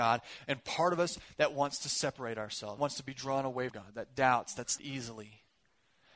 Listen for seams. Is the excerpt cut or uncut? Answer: cut